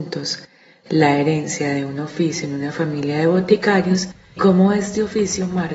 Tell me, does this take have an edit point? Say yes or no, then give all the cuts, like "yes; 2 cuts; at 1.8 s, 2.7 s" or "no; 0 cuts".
yes; 1 cut; at 4.4 s